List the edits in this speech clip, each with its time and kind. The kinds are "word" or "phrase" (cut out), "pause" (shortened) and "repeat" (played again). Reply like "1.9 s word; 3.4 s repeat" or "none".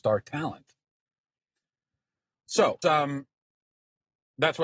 2.8 s word